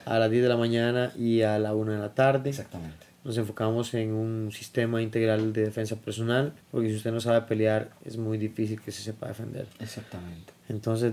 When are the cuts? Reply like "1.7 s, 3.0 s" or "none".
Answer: 6.6 s

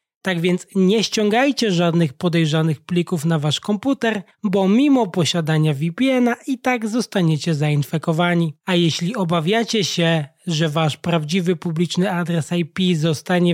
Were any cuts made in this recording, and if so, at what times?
4.3 s, 8.6 s

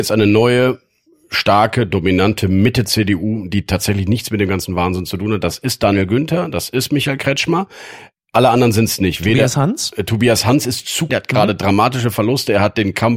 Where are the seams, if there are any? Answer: 11.1 s

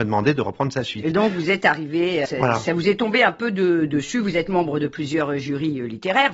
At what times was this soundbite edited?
2.2 s

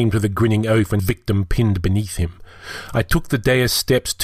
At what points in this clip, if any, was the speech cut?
1.0 s

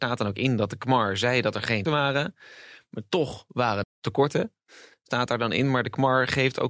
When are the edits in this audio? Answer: 1.8 s, 3.8 s

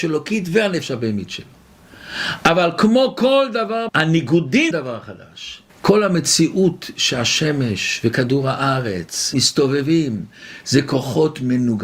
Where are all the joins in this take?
3.9 s, 4.7 s, 5.7 s, 9.3 s

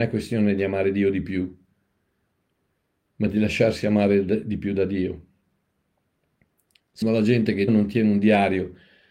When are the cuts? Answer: 7.0 s, 7.7 s

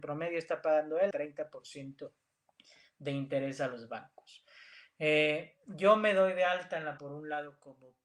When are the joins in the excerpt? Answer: 1.1 s, 7.0 s

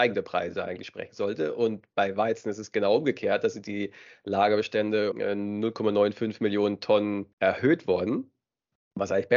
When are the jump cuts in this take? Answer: 5.1 s, 7.3 s

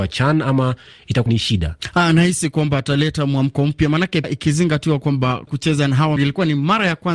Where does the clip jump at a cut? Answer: 1.3 s, 4.2 s, 5.5 s, 6.2 s

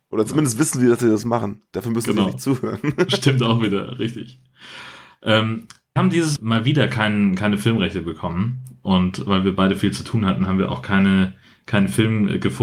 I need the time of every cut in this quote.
6.0 s, 6.4 s

